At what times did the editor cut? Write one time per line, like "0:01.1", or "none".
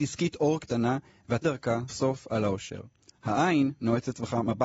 0:01.4
0:01.9